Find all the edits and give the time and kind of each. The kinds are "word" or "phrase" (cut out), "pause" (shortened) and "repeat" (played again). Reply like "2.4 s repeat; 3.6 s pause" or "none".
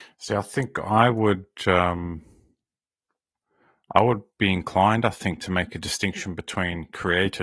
none